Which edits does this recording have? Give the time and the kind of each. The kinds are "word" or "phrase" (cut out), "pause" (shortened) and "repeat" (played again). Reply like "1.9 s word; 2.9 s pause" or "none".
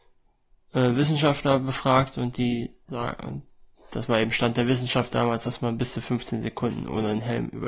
none